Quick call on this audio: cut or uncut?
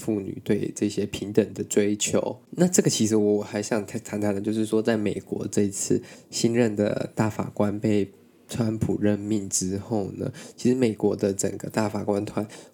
uncut